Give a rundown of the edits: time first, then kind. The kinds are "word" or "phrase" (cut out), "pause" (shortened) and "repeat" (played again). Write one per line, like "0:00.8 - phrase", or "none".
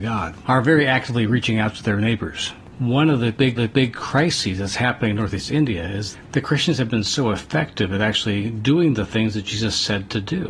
0:03.6 - repeat